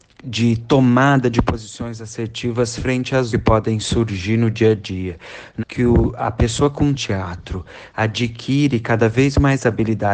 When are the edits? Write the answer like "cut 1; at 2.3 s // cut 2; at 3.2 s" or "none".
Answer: cut 1; at 3.3 s // cut 2; at 5.6 s // cut 3; at 6.9 s